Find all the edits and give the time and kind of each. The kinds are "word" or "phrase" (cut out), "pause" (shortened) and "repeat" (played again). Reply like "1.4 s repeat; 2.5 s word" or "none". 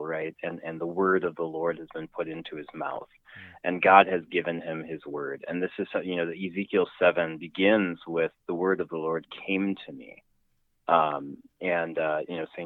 none